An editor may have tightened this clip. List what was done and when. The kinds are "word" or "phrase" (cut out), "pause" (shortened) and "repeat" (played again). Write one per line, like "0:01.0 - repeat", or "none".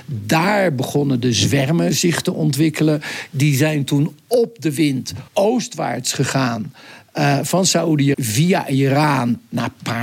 0:05.3 - pause
0:08.1 - word